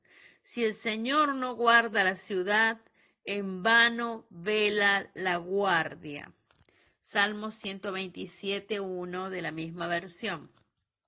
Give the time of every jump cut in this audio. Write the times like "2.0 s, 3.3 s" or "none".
none